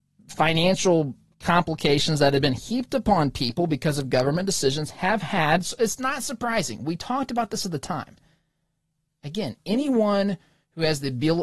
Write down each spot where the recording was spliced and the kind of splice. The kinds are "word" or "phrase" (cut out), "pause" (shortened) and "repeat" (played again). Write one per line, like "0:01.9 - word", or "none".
none